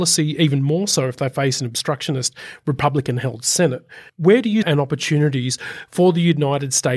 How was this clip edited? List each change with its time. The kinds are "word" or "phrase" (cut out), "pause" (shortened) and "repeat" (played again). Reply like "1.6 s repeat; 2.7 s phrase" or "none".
4.1 s pause; 4.6 s phrase

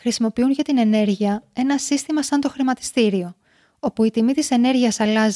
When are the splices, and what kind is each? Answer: none

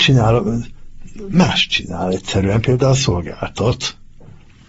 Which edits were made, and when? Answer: none

